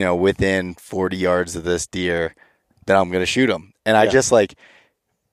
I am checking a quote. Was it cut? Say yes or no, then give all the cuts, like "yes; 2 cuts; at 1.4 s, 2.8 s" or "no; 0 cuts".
no; 0 cuts